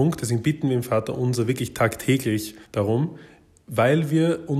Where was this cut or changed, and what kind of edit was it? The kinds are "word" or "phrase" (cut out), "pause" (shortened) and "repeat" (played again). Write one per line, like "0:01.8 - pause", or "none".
0:02.6 - pause